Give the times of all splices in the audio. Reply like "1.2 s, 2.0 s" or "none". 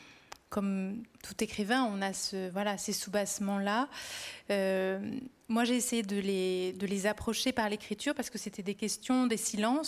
1.1 s

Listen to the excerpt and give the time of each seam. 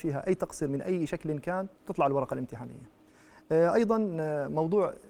1.8 s

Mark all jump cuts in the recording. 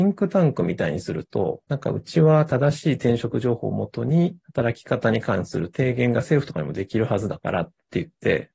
1.6 s, 4.4 s

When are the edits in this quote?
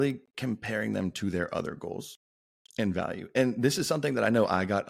none

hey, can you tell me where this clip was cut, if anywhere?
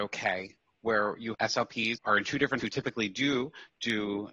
1.3 s, 2.0 s, 2.6 s

